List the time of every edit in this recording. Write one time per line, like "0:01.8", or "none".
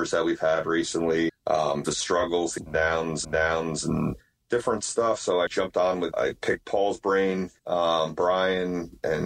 0:01.3
0:01.8
0:02.6
0:03.2
0:05.5
0:06.1
0:07.6